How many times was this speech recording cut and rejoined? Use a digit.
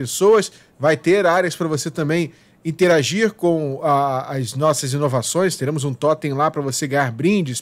0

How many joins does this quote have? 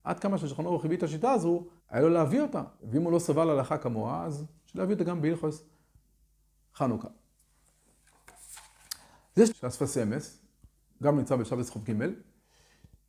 3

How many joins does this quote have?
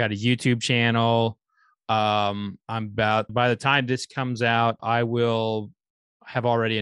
2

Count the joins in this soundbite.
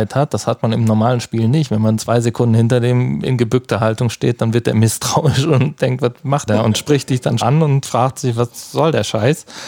3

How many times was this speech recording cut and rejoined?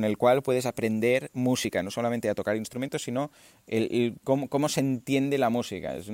0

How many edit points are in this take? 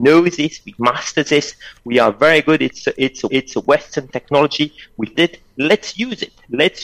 2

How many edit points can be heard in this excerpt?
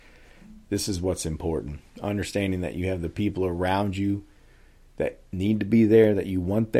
0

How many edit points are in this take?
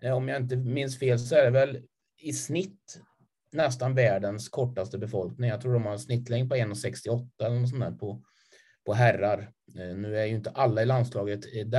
0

